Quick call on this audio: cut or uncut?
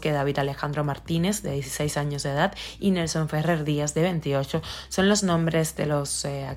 uncut